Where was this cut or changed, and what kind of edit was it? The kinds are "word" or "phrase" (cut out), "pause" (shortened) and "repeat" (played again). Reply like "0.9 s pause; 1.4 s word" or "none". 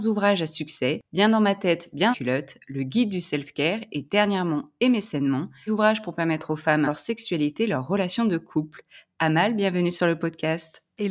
2.1 s phrase; 5.7 s phrase; 6.9 s phrase

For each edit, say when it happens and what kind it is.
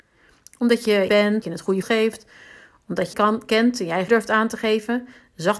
1.1 s word; 1.4 s word; 1.8 s word; 3.1 s phrase; 4.1 s word

